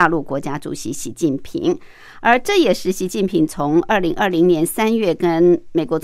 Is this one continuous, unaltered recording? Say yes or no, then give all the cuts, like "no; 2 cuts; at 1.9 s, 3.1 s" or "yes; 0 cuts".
yes; 0 cuts